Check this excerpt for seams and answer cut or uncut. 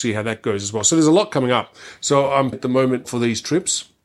cut